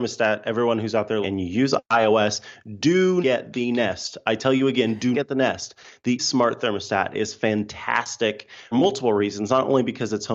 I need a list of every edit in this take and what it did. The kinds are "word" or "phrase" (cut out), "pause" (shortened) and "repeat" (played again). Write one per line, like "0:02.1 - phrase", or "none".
0:01.2 - word
0:03.2 - word
0:05.1 - word
0:06.2 - word
0:08.7 - word